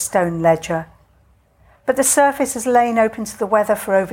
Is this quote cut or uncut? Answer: uncut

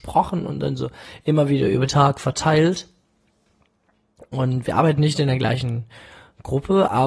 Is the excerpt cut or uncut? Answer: cut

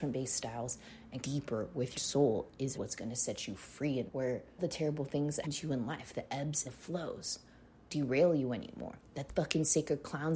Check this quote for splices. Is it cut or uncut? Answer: cut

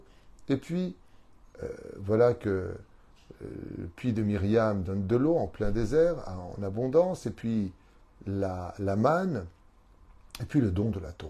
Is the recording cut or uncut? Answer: uncut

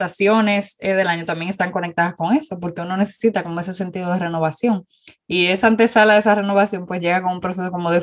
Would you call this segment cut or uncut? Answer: uncut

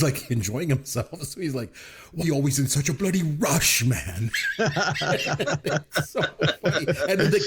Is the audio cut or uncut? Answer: cut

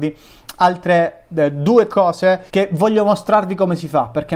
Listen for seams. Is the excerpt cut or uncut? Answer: cut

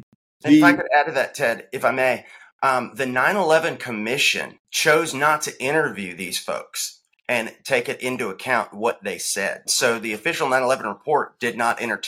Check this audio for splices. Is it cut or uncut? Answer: cut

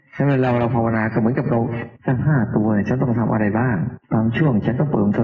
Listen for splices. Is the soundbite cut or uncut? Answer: cut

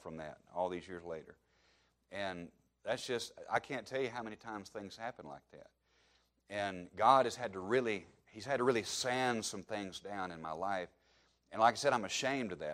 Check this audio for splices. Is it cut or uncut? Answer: uncut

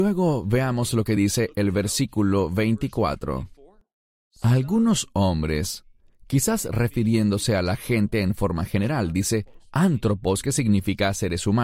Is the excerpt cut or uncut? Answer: uncut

